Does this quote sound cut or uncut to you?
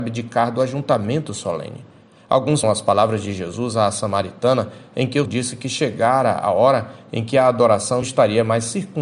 cut